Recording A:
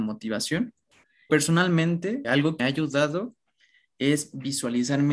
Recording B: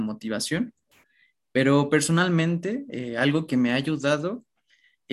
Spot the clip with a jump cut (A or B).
A